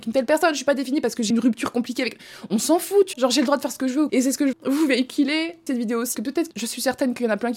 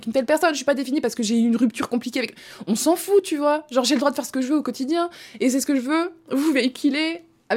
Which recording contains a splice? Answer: first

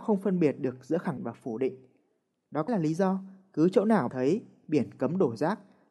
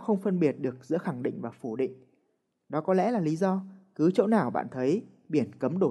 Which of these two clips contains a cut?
first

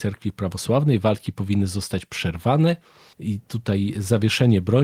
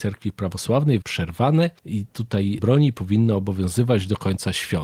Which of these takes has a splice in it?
second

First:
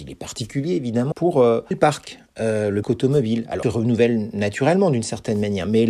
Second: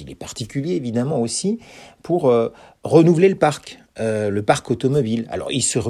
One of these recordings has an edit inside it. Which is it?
first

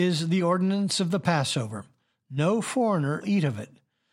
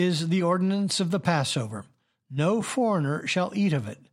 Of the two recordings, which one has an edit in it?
first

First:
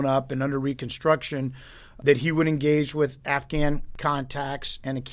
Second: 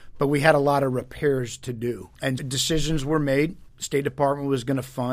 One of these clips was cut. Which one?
second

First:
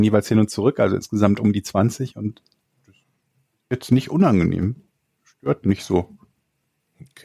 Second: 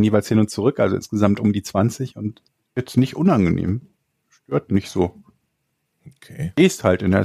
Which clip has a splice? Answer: second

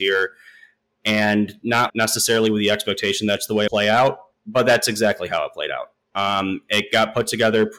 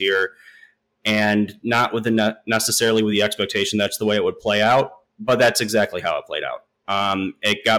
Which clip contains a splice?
first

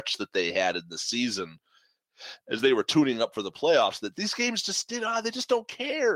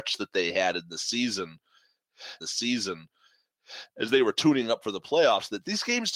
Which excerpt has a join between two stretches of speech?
second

